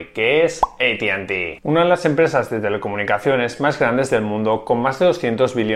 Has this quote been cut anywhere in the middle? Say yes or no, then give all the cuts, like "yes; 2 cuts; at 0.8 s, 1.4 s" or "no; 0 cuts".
no; 0 cuts